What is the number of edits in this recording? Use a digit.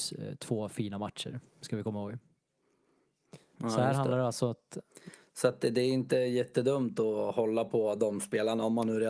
1